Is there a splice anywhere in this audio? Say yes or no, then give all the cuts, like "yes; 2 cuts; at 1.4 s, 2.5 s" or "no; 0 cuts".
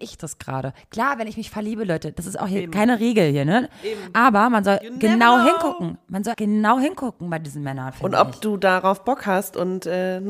yes; 1 cut; at 6.3 s